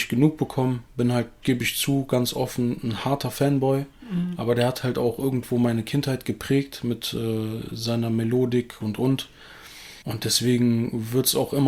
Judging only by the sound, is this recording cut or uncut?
cut